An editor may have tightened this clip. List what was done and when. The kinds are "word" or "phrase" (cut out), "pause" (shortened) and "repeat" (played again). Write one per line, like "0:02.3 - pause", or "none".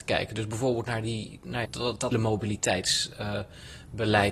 0:01.6 - word
0:02.1 - word